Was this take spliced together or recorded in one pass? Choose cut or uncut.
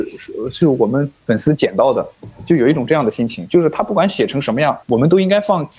cut